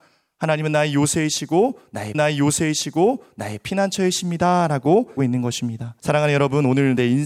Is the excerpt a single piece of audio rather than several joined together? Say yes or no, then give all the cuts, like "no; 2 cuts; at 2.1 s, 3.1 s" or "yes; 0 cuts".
no; 3 cuts; at 2.1 s, 5.2 s, 6.0 s